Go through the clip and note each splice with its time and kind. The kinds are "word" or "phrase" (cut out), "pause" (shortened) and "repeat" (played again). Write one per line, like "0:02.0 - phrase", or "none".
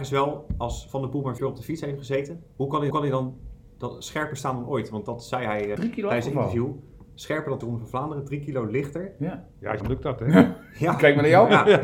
0:01.4 - word
0:02.5 - pause
0:02.9 - repeat
0:05.8 - word
0:07.6 - word
0:09.8 - phrase